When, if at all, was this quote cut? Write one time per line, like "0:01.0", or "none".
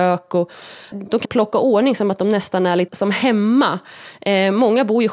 0:00.9
0:01.2
0:02.9

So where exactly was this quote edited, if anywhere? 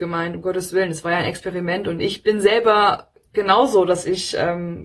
none

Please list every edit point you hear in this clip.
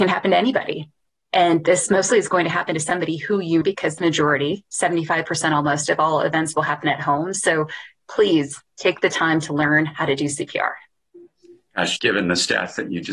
0:02.1
0:03.6
0:04.0
0:12.0

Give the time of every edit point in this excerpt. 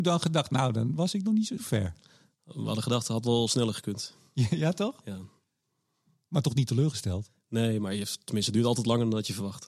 0:01.6

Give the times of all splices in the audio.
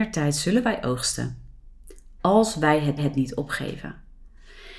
0:03.0

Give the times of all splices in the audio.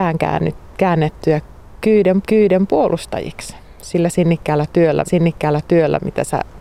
0:02.2
0:05.1

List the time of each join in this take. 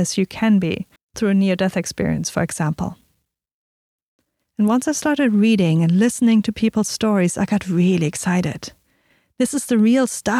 0:01.0

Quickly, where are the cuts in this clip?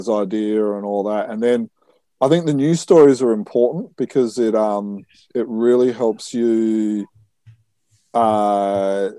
none

